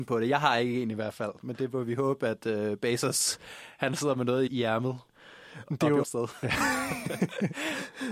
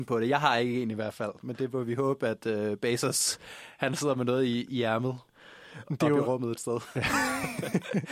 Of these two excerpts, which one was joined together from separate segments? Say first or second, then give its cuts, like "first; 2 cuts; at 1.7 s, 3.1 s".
first; 2 cuts; at 4.5 s, 6.0 s